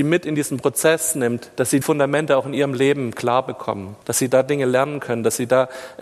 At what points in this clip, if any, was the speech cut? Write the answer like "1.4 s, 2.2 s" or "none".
1.8 s, 4.0 s